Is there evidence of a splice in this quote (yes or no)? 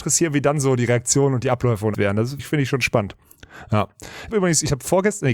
yes